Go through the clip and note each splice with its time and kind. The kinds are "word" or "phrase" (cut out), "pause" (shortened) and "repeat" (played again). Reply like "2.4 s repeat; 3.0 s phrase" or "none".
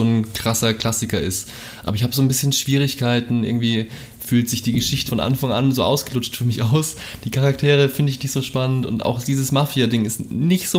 5.1 s word

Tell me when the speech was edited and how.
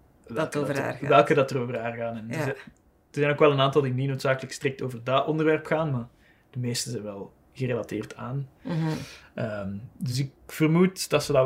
none

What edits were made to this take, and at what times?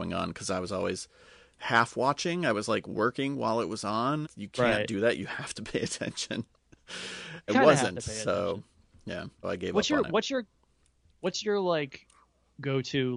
4.2 s word; 7.5 s word; 9.4 s word

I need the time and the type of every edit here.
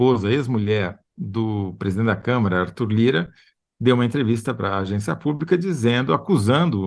none

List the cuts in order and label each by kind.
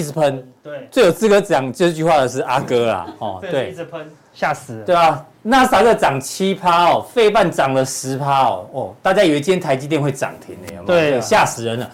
none

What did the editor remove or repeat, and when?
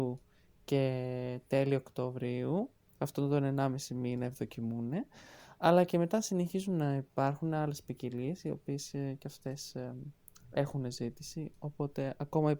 none

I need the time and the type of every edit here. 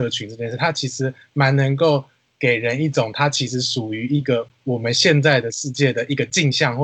none

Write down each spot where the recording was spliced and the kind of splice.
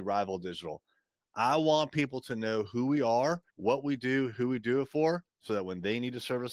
3.5 s pause; 5.3 s pause

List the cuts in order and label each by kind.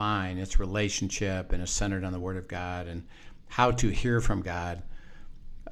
none

